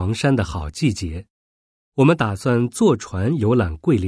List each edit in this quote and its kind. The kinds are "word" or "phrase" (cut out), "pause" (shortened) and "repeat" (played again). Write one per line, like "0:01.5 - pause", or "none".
0:01.6 - pause

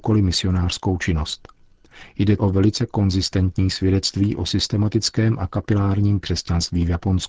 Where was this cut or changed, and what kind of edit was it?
0:02.4 - word
0:06.2 - word

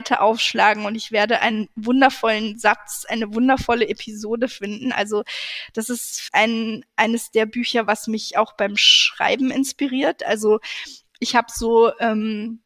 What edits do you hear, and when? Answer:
0:06.3 - word

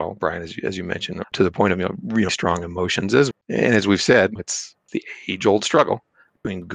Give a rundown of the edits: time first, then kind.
0:01.2 - word
0:02.3 - word
0:03.3 - word
0:04.4 - word
0:04.9 - word

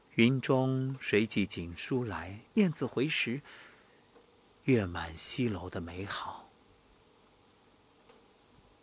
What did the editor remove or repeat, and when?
0:02.5 - pause

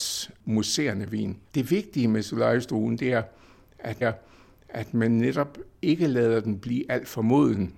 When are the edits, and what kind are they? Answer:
0:01.4 - pause
0:04.0 - repeat

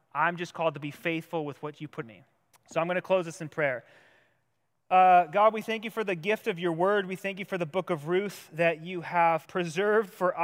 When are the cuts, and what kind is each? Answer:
0:02.0 - phrase
0:02.5 - pause
0:09.4 - word

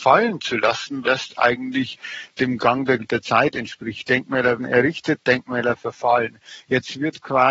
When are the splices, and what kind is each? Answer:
0:01.0 - word
0:03.0 - word
0:04.6 - word

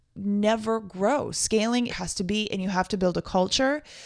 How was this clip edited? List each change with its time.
0:01.9 - phrase

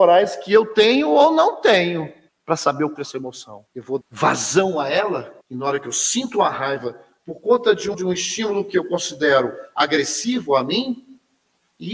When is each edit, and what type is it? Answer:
0:02.3 - pause
0:03.0 - phrase
0:03.7 - pause
0:04.0 - word
0:05.4 - pause
0:07.9 - word

